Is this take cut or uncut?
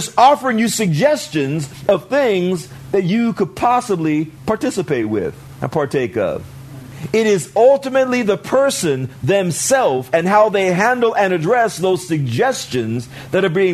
uncut